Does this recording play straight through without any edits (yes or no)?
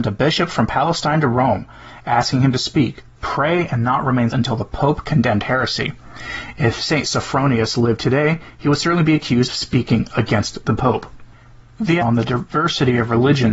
no